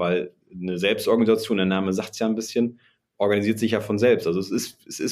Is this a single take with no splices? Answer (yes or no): yes